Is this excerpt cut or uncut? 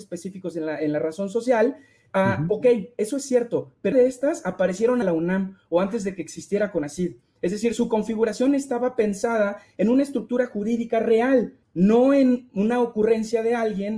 cut